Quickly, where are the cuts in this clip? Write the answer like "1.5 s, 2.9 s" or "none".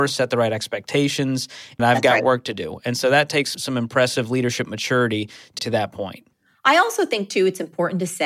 1.8 s, 3.5 s, 5.6 s, 6.3 s